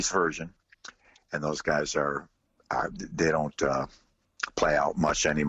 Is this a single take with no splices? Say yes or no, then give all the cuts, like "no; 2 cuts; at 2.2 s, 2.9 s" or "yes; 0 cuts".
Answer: yes; 0 cuts